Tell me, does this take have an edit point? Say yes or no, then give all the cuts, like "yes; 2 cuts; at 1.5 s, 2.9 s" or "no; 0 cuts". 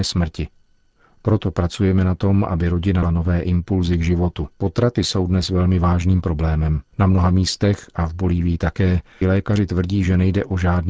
yes; 4 cuts; at 3.0 s, 4.5 s, 6.9 s, 9.2 s